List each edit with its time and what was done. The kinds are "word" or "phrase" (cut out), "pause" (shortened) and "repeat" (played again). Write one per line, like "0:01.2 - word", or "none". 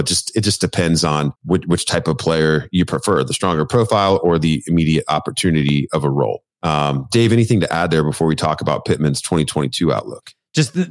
0:01.4 - pause
0:06.5 - pause